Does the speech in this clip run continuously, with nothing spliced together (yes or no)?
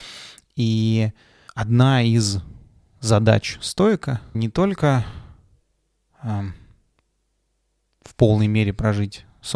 no